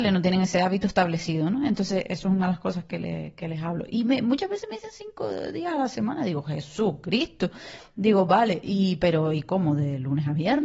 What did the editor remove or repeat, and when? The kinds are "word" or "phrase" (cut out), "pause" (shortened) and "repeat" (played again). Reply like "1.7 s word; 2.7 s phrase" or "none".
none